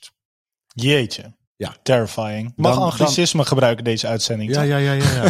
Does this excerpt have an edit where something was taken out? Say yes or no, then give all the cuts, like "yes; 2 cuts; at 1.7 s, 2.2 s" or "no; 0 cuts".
yes; 2 cuts; at 1.4 s, 2.6 s